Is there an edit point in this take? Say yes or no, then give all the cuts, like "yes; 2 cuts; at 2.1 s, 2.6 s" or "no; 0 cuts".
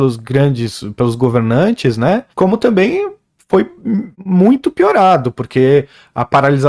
yes; 2 cuts; at 2.3 s, 4.1 s